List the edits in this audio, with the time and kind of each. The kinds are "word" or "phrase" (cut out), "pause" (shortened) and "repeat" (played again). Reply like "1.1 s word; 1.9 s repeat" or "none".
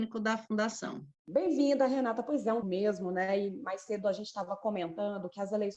2.6 s phrase